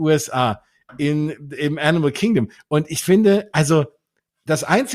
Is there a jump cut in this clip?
no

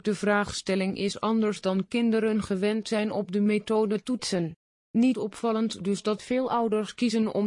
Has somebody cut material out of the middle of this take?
no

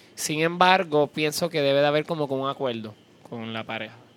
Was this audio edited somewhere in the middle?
no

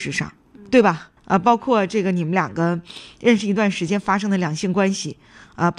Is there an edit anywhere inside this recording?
yes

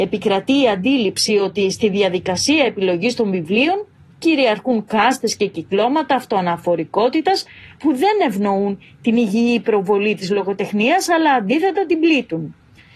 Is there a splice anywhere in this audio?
no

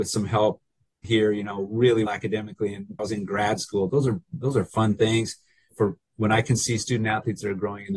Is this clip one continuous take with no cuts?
no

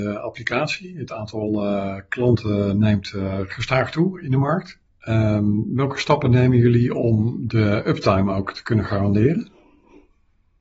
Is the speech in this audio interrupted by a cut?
no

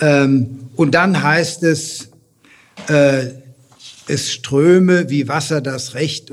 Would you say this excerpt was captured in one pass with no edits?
no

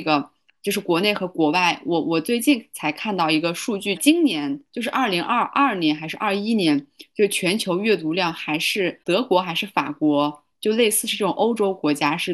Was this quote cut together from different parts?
yes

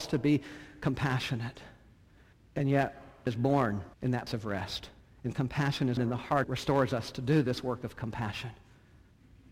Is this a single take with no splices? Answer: no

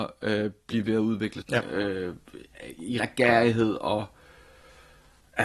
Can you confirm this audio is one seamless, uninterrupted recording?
no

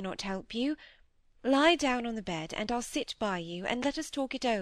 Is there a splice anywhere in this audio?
no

